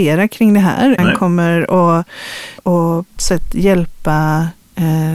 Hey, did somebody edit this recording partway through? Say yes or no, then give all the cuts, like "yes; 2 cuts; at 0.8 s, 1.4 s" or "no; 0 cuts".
yes; 3 cuts; at 1.0 s, 2.6 s, 3.2 s